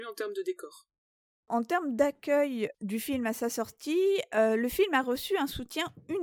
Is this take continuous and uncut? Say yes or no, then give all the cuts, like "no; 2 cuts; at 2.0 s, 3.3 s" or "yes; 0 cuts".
yes; 0 cuts